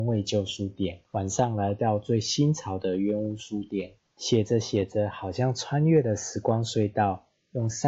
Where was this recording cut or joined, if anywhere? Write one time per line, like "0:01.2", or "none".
0:01.1
0:04.0